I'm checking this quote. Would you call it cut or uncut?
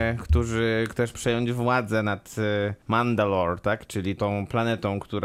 cut